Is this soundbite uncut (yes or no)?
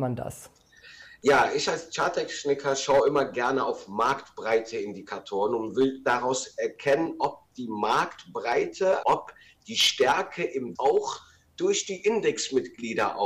no